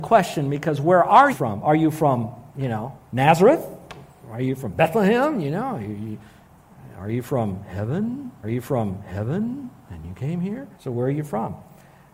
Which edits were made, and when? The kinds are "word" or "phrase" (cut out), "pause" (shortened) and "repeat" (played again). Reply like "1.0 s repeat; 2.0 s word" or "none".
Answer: 1.3 s word; 2.5 s pause; 3.0 s pause; 8.4 s repeat; 10.7 s pause